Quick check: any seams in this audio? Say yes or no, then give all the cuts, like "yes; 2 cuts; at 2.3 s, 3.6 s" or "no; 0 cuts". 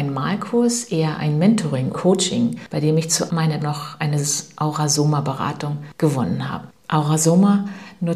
yes; 3 cuts; at 1.9 s, 3.3 s, 3.6 s